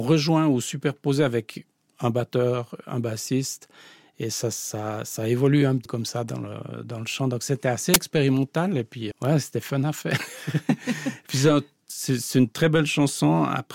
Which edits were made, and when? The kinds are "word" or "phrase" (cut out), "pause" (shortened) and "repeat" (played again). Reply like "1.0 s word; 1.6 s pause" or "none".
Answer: 5.9 s word; 9.1 s word